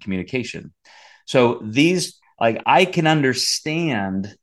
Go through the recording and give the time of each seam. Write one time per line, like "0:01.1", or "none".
0:02.2
0:02.6